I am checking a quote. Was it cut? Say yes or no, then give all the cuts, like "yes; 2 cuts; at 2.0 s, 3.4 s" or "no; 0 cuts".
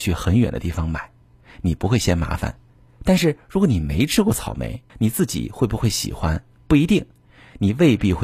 yes; 1 cut; at 4.9 s